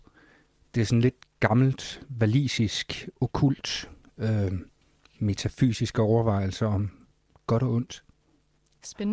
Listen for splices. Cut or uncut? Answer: uncut